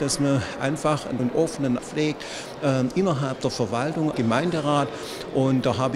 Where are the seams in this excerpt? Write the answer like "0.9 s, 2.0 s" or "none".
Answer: 1.2 s, 1.8 s, 4.1 s

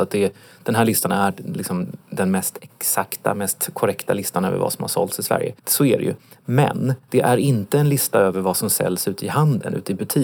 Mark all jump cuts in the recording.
5.6 s, 7.0 s

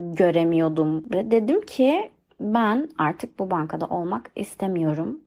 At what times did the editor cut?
none

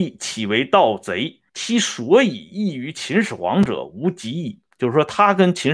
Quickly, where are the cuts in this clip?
1.5 s, 4.7 s

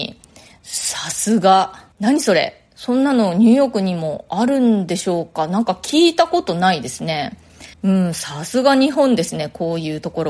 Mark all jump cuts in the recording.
1.9 s, 7.7 s

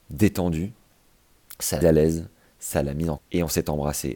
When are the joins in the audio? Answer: 1.8 s, 3.2 s

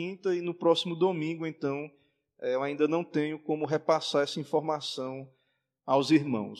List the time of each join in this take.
none

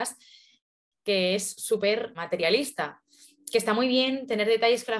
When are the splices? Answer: 2.1 s

